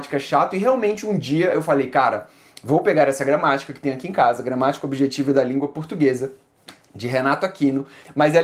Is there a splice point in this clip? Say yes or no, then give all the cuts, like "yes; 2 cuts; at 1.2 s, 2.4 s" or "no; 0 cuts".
no; 0 cuts